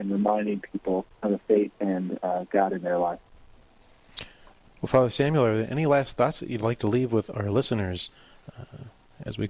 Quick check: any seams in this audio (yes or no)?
yes